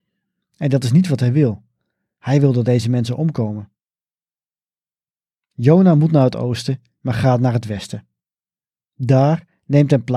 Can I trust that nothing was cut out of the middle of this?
yes; 0 cuts

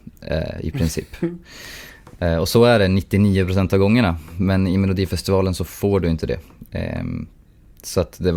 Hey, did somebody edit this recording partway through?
no; 0 cuts

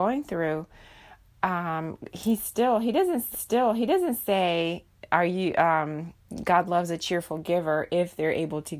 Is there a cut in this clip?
yes; 1 cut; at 3.3 s

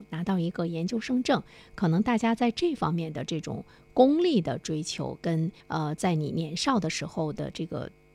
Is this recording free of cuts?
no; 1 cut; at 5.6 s

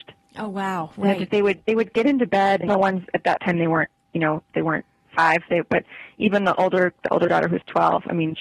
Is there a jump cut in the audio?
yes; 1 cut; at 2.7 s

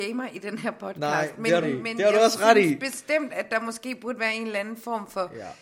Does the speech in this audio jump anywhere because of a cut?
yes; 1 cut; at 1.6 s

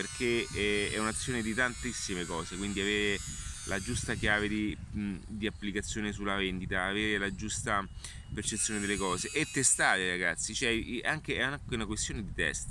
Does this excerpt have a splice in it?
no; 0 cuts

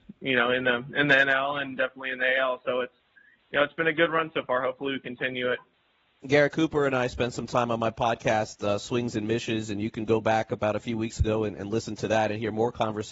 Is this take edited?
no; 0 cuts

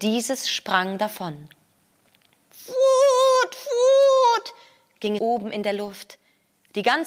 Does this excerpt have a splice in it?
yes; 1 cut; at 5.2 s

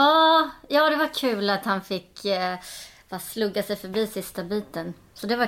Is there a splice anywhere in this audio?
no; 0 cuts

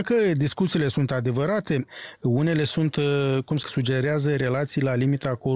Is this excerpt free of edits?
no; 1 cut; at 3.6 s

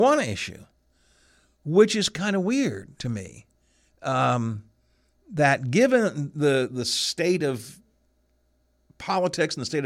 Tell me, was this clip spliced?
no; 0 cuts

